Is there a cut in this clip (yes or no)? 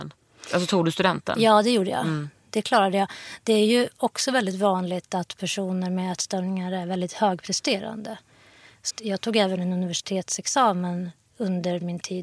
yes